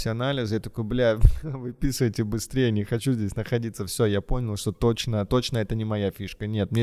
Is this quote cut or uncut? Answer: uncut